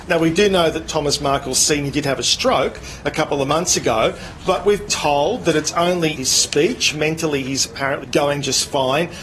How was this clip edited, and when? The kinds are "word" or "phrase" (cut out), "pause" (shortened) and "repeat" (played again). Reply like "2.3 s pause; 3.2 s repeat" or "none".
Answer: 4.9 s word; 6.2 s word; 8.0 s word